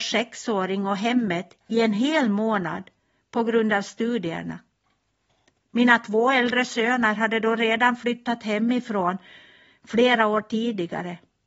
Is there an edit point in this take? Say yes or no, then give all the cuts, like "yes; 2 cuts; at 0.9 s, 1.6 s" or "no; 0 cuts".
no; 0 cuts